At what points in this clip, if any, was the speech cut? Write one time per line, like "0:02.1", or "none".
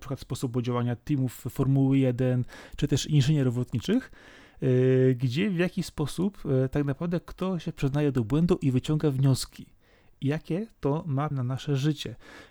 0:11.3